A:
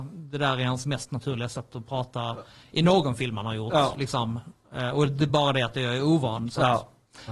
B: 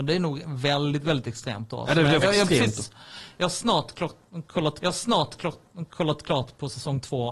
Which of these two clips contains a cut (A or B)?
B